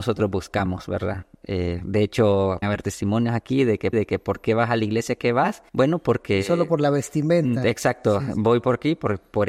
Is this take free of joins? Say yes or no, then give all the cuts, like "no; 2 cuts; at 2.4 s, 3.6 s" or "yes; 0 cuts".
no; 3 cuts; at 2.6 s, 3.9 s, 5.7 s